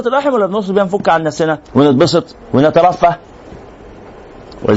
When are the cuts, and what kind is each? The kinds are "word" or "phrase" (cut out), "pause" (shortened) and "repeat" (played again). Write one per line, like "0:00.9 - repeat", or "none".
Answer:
0:01.6 - pause